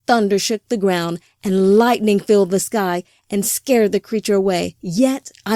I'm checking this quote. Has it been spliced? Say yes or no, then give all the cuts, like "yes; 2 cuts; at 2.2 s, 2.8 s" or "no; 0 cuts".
no; 0 cuts